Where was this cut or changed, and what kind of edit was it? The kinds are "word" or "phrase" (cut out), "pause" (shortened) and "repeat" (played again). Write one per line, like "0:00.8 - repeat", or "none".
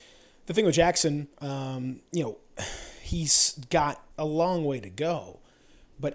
0:01.3 - pause
0:04.1 - pause

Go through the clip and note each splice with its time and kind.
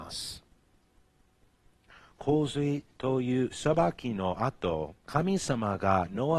0:05.0 - pause

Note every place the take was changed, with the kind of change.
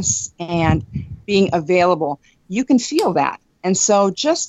none

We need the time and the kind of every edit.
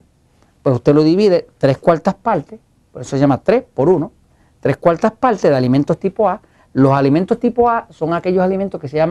none

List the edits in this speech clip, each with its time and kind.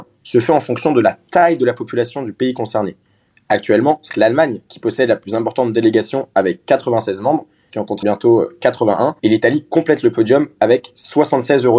0:04.1 - word
0:07.7 - phrase
0:08.0 - word
0:09.2 - pause

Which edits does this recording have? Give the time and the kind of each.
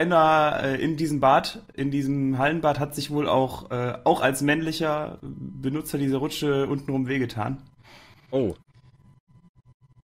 none

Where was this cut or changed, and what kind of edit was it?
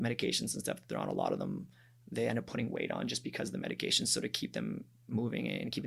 none

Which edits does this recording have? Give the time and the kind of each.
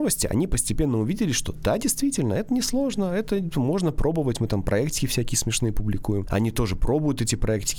none

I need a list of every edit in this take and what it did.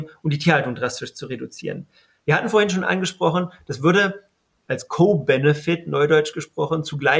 none

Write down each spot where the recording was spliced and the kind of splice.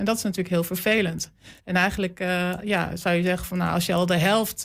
0:01.6 - pause

